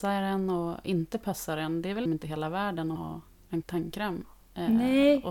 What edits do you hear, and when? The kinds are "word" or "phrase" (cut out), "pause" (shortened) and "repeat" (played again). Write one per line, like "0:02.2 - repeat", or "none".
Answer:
0:02.1 - word
0:03.0 - word
0:03.6 - word